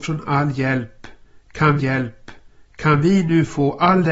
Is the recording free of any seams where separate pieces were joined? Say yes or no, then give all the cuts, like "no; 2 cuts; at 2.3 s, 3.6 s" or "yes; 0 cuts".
no; 1 cut; at 1.8 s